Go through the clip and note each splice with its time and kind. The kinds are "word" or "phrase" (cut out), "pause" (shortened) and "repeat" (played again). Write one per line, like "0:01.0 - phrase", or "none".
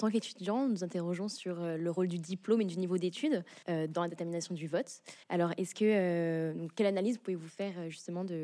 0:03.6 - pause
0:05.2 - pause